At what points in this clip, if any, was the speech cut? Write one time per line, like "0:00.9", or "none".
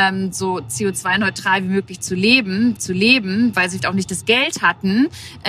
0:02.8
0:03.8